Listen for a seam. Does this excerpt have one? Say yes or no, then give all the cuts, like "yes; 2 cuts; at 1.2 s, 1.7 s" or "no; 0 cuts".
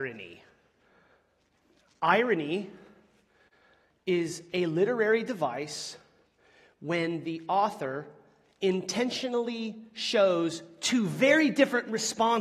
no; 0 cuts